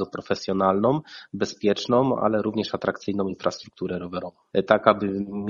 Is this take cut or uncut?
uncut